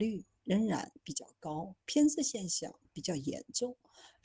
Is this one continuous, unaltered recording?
no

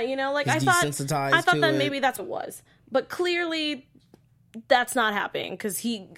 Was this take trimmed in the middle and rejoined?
yes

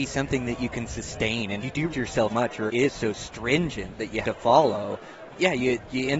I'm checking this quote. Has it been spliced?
yes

